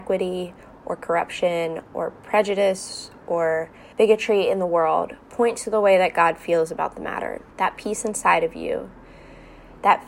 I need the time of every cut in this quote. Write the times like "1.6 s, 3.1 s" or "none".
3.9 s, 7.5 s